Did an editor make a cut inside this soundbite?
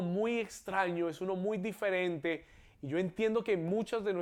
no; 0 cuts

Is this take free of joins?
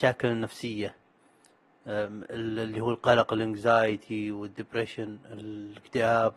yes; 0 cuts

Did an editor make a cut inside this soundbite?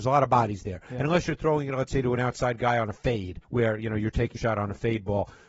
yes; 2 cuts; at 3.4 s, 4.4 s

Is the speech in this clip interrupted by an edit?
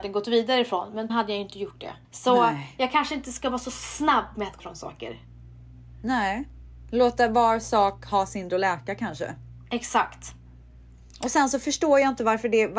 yes; 4 cuts; at 1.1 s, 2.0 s, 4.6 s, 8.5 s

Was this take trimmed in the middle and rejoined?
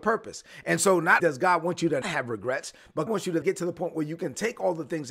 yes; 4 cuts; at 1.2 s, 2.0 s, 3.1 s, 3.4 s

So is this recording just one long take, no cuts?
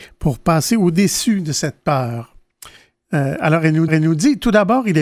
no; 1 cut; at 3.9 s

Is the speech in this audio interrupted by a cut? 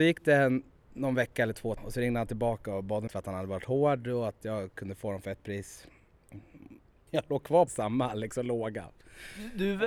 yes; 4 cuts; at 1.8 s, 3.1 s, 7.1 s, 7.7 s

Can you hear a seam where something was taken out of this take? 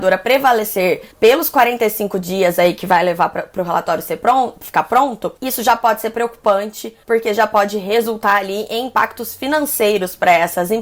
yes; 3 cuts; at 1.1 s, 5.4 s, 7.0 s

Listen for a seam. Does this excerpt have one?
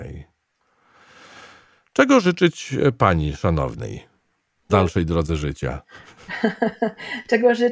yes; 1 cut; at 4.7 s

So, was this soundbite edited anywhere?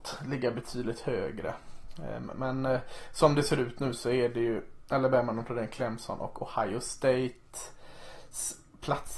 no; 0 cuts

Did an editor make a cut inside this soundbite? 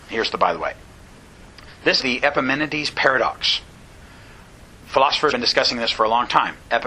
yes; 2 cuts; at 2.0 s, 5.3 s

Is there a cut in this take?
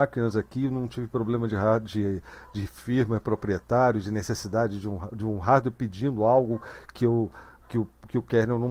no; 0 cuts

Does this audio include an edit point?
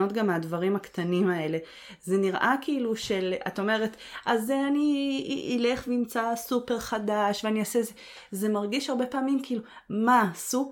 no; 0 cuts

